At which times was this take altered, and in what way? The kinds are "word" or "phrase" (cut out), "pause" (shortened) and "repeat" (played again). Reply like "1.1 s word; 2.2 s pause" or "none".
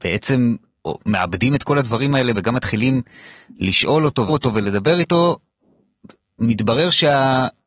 2.3 s word; 4.3 s word